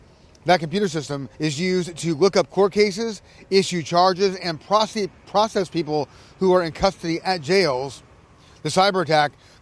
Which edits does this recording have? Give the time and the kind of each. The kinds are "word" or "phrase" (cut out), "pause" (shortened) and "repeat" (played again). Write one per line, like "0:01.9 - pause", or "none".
0:01.3 - pause